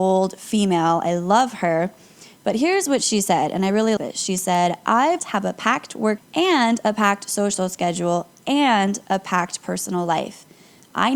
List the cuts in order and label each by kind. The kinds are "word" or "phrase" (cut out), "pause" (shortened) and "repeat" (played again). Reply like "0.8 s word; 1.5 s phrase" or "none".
4.0 s word; 5.2 s phrase; 6.2 s word